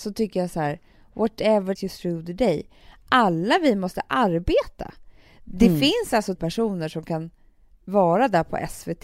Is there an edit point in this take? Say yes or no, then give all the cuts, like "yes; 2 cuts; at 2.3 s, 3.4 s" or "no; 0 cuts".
yes; 2 cuts; at 1.8 s, 6.4 s